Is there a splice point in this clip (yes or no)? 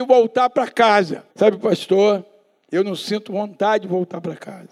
yes